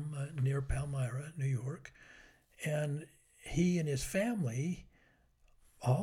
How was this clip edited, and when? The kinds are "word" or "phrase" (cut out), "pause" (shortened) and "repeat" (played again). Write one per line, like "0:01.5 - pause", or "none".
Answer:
none